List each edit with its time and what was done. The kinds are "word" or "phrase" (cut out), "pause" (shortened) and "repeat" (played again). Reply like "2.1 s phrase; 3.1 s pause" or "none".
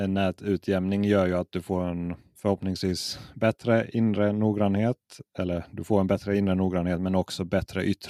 none